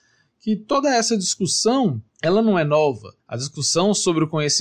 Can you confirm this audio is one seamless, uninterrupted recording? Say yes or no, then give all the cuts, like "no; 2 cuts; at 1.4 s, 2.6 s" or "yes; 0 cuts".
no; 2 cuts; at 2.1 s, 3.2 s